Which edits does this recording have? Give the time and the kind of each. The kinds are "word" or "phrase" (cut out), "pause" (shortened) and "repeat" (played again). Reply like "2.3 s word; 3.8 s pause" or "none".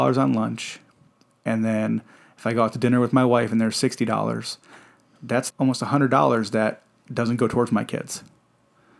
5.5 s word